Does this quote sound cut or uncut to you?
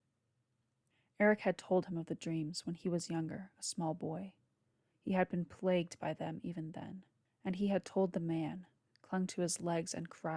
cut